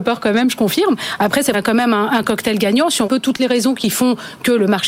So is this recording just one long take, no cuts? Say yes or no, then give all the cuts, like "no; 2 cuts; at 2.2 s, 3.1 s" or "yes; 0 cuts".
no; 2 cuts; at 1.5 s, 3.1 s